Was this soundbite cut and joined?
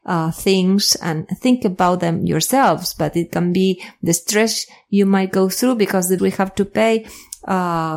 yes; 1 cut; at 6.2 s

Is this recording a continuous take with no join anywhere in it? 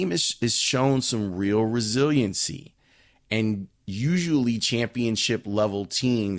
yes; 0 cuts

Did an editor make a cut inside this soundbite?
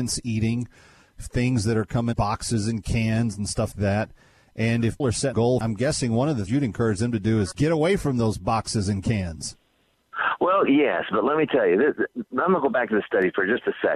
yes; 5 cuts; at 2.1 s, 3.7 s, 5.0 s, 5.3 s, 6.5 s

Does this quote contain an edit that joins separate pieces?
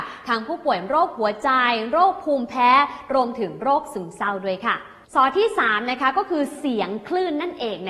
no; 0 cuts

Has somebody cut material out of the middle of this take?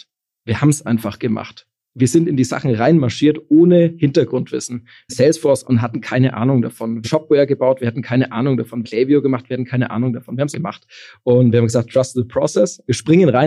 yes; 5 cuts; at 5.1 s, 5.6 s, 7.0 s, 8.8 s, 10.5 s

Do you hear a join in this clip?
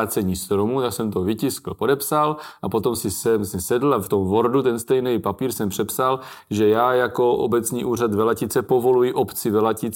no; 0 cuts

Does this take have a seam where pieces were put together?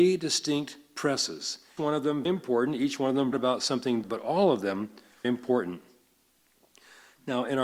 yes; 5 cuts; at 1.8 s, 2.3 s, 3.3 s, 4.0 s, 5.2 s

